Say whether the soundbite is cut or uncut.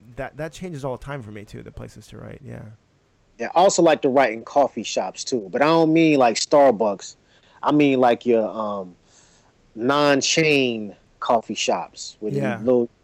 uncut